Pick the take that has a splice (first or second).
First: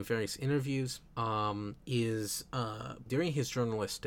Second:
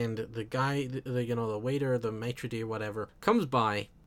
first